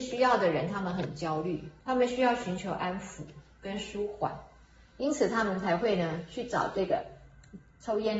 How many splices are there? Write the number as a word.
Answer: one